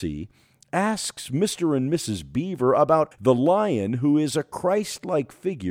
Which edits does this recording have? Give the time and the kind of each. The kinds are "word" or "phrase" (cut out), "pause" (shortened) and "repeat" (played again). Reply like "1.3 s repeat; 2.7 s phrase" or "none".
3.1 s word